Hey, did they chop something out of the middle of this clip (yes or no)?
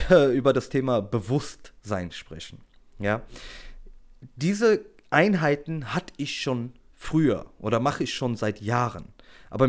no